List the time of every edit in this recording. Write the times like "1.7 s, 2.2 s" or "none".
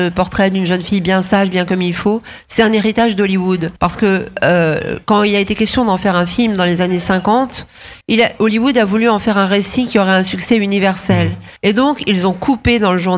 3.8 s, 8.0 s, 11.6 s